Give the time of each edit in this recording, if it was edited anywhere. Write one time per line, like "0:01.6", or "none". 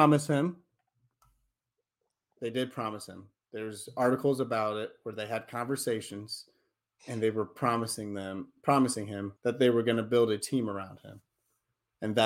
0:09.4

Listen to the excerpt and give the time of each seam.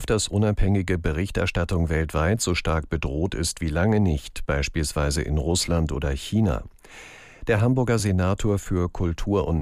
none

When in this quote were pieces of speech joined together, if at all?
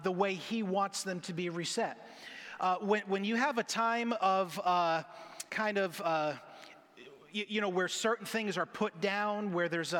0:05.5

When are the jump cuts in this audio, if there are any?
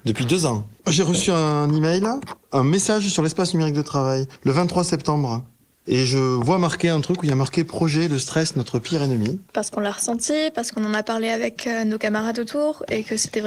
0:09.5

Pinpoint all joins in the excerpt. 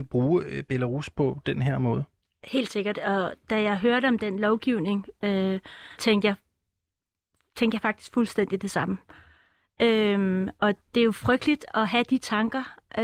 0:06.0

